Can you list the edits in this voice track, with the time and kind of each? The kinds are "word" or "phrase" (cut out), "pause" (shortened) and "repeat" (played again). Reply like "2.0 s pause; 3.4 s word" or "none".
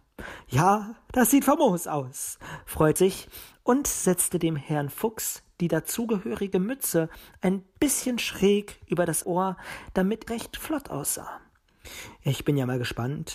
3.0 s word; 9.2 s word; 10.3 s word